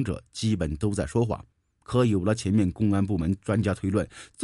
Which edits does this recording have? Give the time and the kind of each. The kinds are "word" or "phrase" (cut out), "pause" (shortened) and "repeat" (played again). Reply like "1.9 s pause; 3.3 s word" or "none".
1.5 s pause

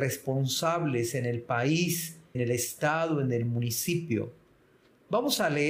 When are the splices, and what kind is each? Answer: 2.3 s word

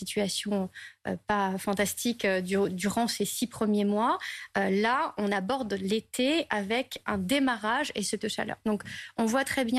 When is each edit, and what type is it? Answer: 8.2 s word

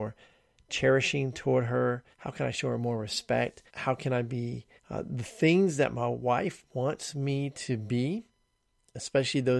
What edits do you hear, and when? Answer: 2.1 s pause; 3.7 s pause; 4.8 s pause

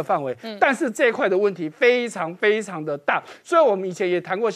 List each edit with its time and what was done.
none

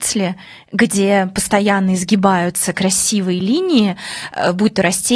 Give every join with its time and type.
none

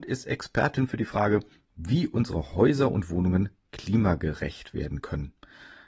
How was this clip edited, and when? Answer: 1.5 s pause

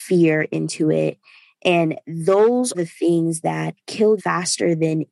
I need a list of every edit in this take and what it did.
2.7 s word; 4.2 s word

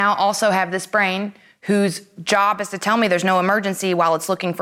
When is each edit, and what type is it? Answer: none

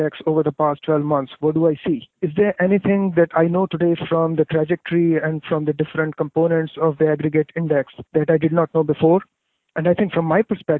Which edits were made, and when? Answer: 2.1 s pause; 8.1 s pause

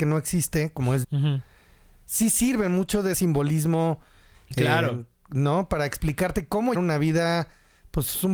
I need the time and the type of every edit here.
1.0 s word; 3.1 s word; 6.7 s word

